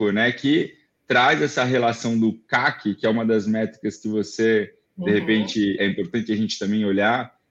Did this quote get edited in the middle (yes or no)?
yes